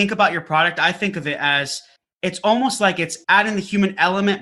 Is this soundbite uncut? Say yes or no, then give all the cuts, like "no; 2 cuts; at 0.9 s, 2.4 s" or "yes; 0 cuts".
no; 2 cuts; at 2.0 s, 3.2 s